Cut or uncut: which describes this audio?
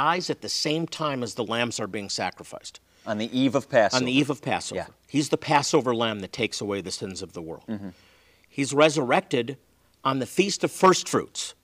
uncut